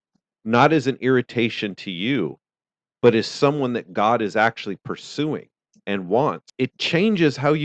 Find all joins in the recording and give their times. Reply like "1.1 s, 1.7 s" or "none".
none